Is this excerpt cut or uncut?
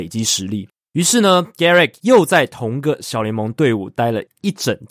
uncut